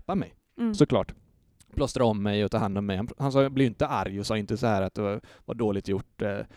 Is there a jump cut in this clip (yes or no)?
no